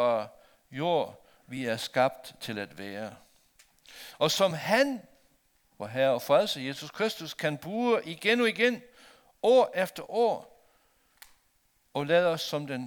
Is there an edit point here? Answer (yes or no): no